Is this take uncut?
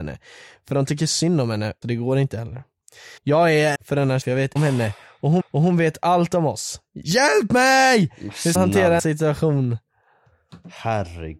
no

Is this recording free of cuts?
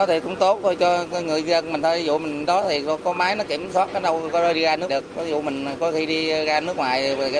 no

